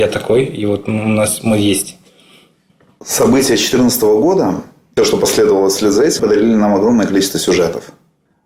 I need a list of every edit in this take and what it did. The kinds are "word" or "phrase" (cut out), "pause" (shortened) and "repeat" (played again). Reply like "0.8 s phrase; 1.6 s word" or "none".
5.0 s word; 6.2 s word